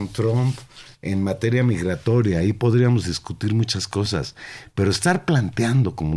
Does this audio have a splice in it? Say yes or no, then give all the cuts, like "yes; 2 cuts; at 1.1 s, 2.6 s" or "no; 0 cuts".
no; 0 cuts